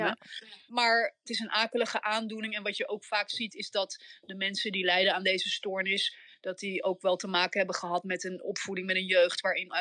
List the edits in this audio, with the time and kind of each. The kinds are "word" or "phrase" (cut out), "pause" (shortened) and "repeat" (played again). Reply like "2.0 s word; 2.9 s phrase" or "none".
none